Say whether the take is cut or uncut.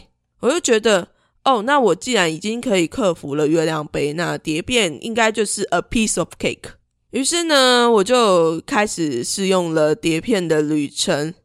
uncut